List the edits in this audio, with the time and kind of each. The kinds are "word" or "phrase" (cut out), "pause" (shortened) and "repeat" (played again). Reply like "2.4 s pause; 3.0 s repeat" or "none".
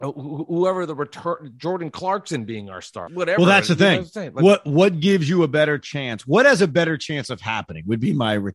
3.1 s word